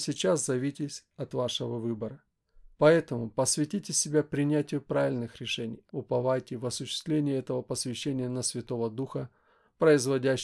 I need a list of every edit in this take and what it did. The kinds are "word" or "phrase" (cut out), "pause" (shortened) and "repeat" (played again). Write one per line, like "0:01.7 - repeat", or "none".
0:01.1 - pause
0:02.7 - pause
0:05.9 - phrase